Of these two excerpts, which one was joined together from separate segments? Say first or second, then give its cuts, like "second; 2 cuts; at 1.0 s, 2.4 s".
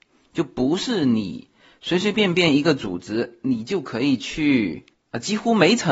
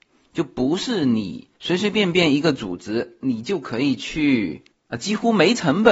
second; 1 cut; at 1.5 s